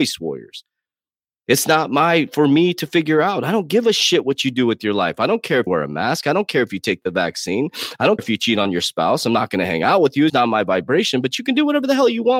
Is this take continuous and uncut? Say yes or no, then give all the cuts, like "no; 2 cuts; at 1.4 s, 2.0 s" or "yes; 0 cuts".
no; 3 cuts; at 5.7 s, 8.2 s, 10.3 s